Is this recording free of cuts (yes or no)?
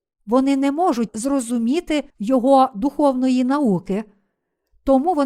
no